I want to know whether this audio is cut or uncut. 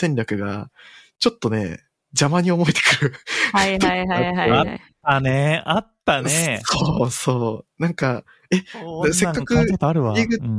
uncut